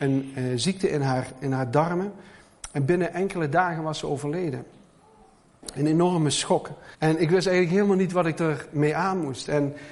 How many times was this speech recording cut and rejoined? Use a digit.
1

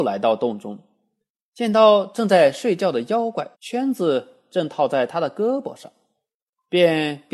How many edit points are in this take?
1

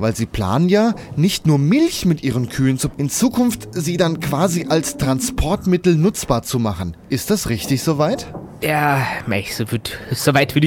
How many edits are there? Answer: 1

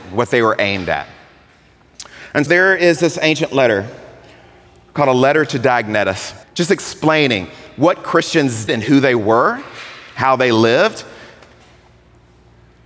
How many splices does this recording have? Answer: 3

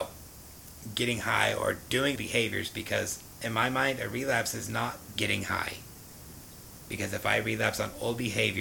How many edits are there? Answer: 2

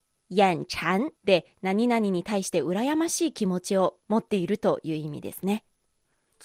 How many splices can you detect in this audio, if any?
1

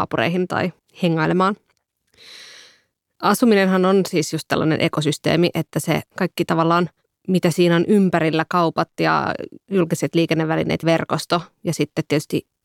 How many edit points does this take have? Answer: 1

